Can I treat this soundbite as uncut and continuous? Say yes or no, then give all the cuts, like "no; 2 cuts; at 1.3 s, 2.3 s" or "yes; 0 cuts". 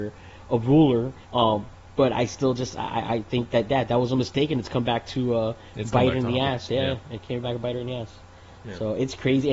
no; 1 cut; at 1.2 s